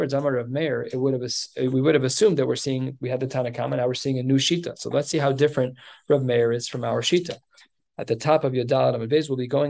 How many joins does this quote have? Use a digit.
0